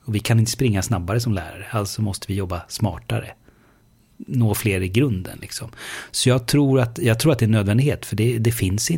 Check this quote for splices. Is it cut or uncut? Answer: uncut